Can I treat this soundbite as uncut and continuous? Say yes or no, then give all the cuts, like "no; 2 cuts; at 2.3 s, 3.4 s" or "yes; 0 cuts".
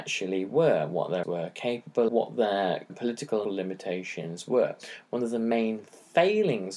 no; 4 cuts; at 1.2 s, 2.1 s, 2.9 s, 3.4 s